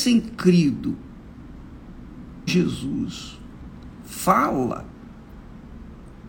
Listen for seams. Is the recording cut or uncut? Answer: cut